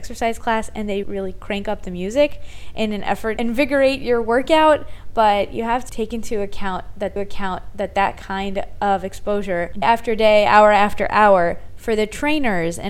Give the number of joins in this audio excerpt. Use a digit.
5